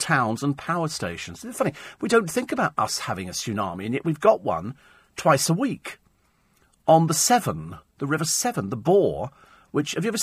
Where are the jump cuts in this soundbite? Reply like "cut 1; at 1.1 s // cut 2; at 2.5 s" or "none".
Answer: none